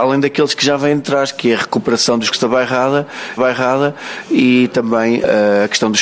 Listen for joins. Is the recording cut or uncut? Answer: cut